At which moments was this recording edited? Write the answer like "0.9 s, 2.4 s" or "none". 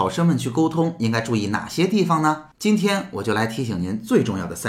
2.5 s